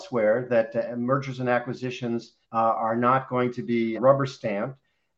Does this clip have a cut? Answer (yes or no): yes